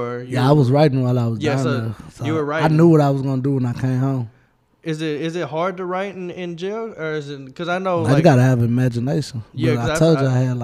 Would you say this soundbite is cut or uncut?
uncut